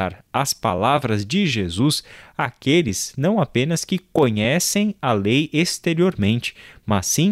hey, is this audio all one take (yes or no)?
yes